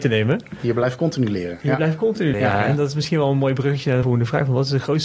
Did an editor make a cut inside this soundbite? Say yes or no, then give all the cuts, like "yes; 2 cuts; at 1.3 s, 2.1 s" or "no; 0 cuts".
yes; 2 cuts; at 2.3 s, 4.0 s